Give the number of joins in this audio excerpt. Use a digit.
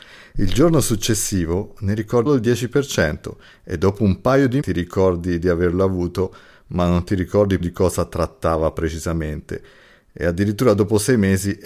3